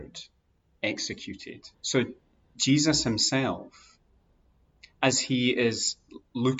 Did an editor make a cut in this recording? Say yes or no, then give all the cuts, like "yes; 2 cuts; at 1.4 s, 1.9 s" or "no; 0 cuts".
yes; 1 cut; at 1.7 s